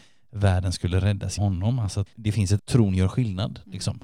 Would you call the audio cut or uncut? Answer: cut